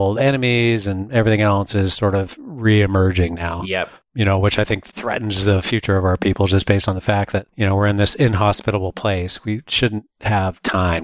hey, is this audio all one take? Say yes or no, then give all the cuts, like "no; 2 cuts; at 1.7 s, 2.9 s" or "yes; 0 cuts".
no; 1 cut; at 4.9 s